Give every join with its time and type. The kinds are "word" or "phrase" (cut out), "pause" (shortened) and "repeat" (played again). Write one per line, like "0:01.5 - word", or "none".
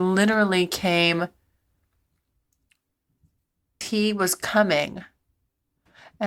0:03.8 - word